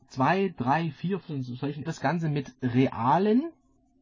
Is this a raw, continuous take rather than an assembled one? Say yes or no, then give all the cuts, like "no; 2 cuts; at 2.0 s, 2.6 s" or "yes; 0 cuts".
no; 2 cuts; at 1.2 s, 1.9 s